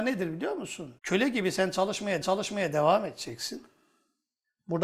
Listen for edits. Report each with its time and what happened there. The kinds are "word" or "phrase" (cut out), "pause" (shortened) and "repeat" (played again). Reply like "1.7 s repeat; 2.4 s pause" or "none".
1.0 s pause; 2.2 s repeat